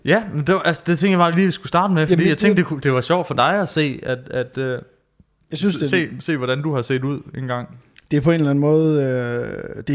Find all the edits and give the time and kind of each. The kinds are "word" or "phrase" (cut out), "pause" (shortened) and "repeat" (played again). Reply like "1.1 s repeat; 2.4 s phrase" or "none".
none